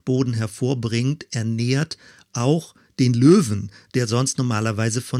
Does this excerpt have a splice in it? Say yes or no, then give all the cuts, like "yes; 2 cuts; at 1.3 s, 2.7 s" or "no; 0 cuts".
no; 0 cuts